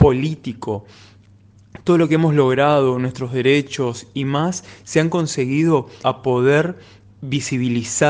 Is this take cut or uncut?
cut